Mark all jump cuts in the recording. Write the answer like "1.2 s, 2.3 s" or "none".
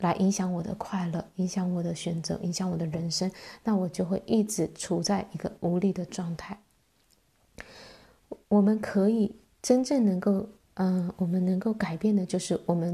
8.4 s